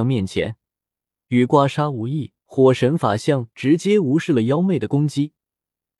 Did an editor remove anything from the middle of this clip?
yes; 1 cut; at 2.4 s

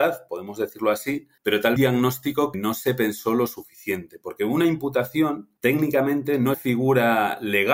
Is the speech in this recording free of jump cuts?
no; 5 cuts; at 1.4 s, 1.8 s, 2.5 s, 5.6 s, 6.5 s

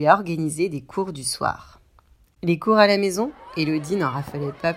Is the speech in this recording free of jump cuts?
yes; 0 cuts

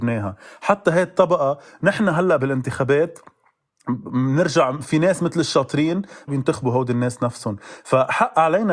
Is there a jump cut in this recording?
yes; 1 cut; at 6.3 s

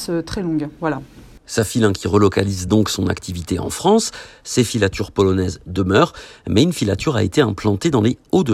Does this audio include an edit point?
no; 0 cuts

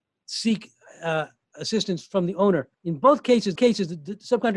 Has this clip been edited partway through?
yes; 2 cuts; at 2.7 s, 3.6 s

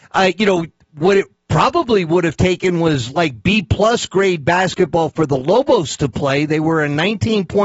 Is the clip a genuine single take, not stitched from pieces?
yes; 0 cuts

